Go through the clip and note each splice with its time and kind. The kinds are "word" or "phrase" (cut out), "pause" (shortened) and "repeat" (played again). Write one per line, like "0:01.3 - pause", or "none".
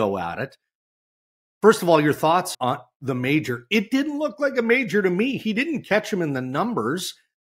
0:02.5 - word